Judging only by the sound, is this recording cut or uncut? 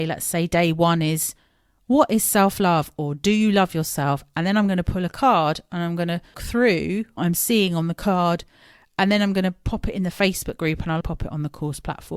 cut